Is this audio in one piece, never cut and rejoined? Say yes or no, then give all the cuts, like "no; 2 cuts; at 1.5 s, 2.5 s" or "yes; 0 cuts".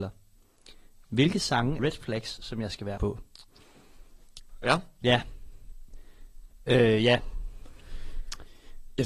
no; 2 cuts; at 1.8 s, 3.0 s